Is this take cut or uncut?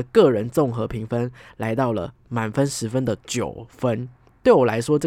uncut